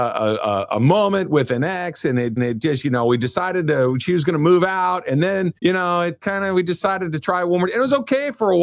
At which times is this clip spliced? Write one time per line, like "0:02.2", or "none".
0:02.4
0:05.6